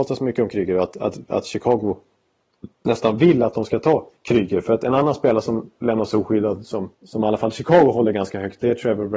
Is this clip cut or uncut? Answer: cut